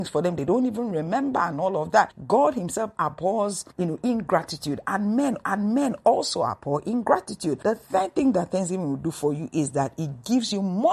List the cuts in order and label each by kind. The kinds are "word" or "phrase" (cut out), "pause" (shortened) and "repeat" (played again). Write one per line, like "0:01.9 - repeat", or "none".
0:05.4 - repeat